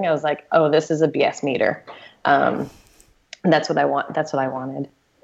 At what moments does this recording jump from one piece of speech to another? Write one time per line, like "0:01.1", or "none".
none